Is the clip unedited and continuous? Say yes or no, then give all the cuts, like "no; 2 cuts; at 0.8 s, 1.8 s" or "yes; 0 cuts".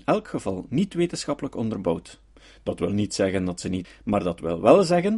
no; 1 cut; at 3.8 s